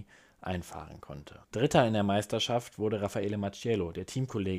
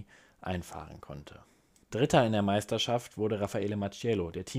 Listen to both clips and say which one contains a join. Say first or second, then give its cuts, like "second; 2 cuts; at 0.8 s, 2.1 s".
first; 1 cut; at 1.4 s